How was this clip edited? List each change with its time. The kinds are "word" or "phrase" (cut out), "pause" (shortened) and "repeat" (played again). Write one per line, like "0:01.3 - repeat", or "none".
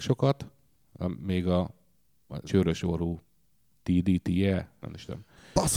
0:02.5 - word
0:04.8 - word